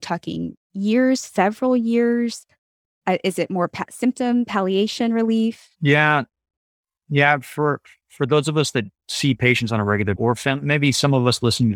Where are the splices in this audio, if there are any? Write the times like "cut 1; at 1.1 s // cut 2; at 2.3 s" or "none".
cut 1; at 10.2 s